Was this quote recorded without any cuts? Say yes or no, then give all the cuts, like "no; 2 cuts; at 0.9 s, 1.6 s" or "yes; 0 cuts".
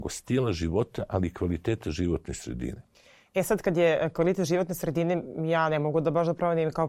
yes; 0 cuts